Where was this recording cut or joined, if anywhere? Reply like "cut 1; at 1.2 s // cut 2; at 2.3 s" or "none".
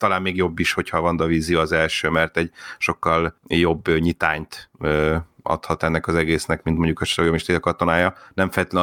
cut 1; at 3.4 s

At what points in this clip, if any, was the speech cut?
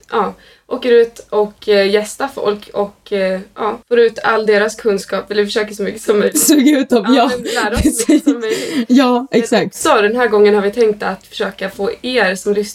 cut 1; at 3.8 s // cut 2; at 5.8 s

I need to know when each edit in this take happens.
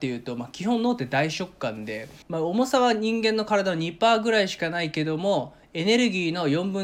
cut 1; at 2.2 s

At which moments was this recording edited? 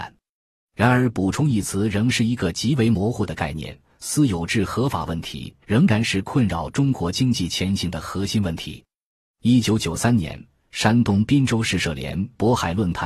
cut 1; at 5.6 s

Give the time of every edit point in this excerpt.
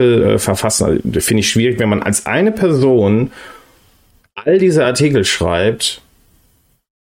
none

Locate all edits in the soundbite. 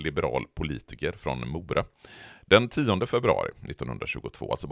none

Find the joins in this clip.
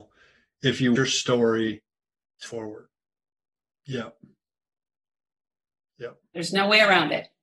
cut 1; at 1.0 s // cut 2; at 2.5 s

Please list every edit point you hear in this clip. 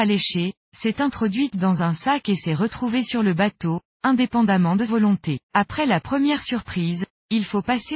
cut 1; at 4.9 s // cut 2; at 5.4 s

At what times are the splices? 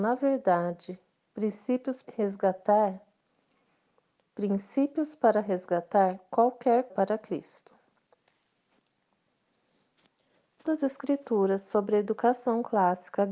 cut 1; at 2.0 s // cut 2; at 6.9 s // cut 3; at 10.7 s

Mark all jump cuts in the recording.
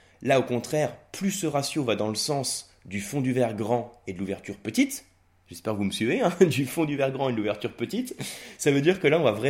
none

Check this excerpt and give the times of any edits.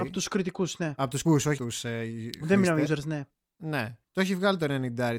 cut 1; at 1.2 s // cut 2; at 1.6 s // cut 3; at 2.9 s // cut 4; at 4.0 s

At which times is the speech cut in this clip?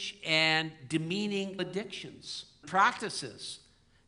cut 1; at 1.6 s // cut 2; at 2.6 s

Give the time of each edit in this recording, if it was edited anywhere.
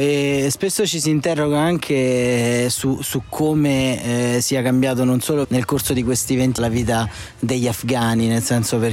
cut 1; at 5.4 s // cut 2; at 6.6 s

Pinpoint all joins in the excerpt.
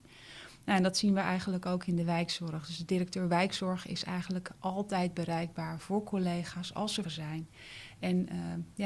cut 1; at 7.0 s

